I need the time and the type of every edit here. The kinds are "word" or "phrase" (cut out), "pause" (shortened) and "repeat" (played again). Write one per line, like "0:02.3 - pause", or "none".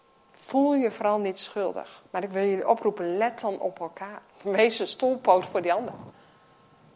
0:02.1 - pause
0:04.3 - pause